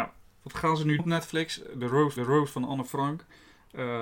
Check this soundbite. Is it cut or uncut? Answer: cut